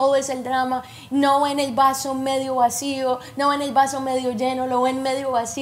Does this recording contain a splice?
no; 0 cuts

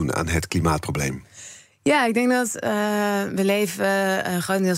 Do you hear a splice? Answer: no; 0 cuts

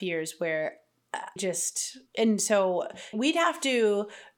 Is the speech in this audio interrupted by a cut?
yes; 3 cuts; at 1.4 s, 2.1 s, 3.1 s

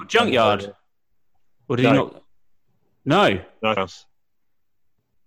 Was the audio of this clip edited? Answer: yes; 1 cut; at 3.8 s

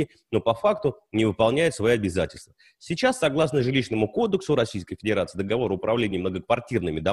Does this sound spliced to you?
no; 0 cuts

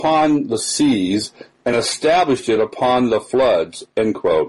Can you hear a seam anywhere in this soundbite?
no; 0 cuts

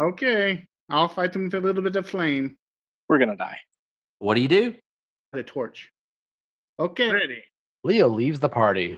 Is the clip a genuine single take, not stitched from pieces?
no; 2 cuts; at 5.3 s, 7.1 s

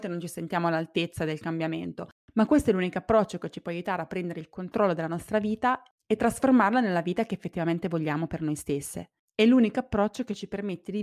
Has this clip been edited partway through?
no; 0 cuts

